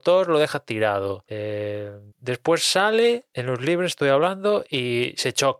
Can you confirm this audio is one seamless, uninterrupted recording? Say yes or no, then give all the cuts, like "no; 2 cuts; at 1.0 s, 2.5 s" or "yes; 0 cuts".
no; 1 cut; at 2.1 s